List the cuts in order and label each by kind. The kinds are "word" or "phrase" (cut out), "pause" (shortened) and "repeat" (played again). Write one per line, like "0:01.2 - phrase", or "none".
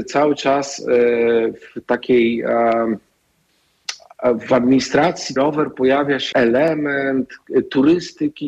0:05.4 - word
0:06.3 - word